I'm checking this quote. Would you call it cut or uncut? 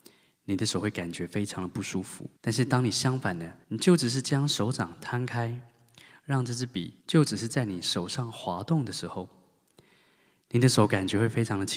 cut